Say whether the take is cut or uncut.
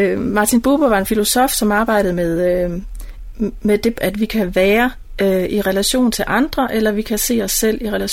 cut